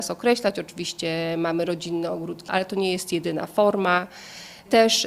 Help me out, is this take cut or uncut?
cut